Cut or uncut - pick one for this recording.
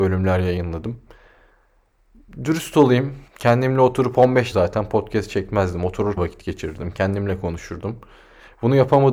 cut